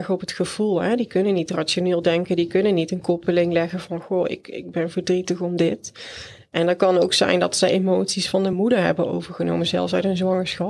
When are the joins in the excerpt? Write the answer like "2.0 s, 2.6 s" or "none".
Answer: none